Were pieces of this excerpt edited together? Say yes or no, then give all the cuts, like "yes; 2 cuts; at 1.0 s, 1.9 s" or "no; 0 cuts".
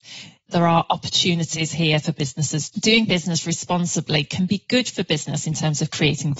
yes; 1 cut; at 2.7 s